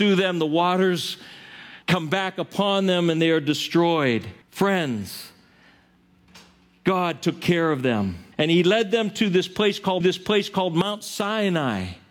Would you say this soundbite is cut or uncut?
cut